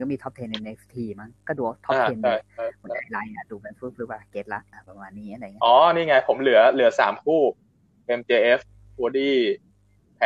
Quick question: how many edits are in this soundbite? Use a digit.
0